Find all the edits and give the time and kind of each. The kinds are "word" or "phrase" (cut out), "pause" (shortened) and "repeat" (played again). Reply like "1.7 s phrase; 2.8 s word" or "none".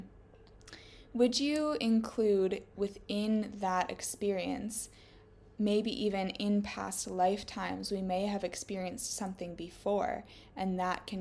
none